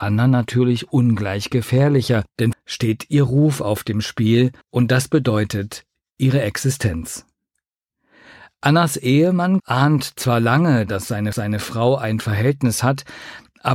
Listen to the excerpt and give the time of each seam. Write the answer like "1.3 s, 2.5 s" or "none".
2.5 s, 4.6 s, 9.6 s, 11.3 s